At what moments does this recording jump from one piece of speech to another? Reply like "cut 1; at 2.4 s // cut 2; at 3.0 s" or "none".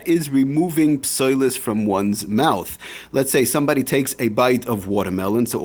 none